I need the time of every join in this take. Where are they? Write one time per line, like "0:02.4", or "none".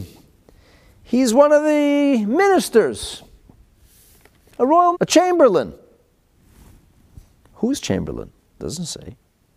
0:04.9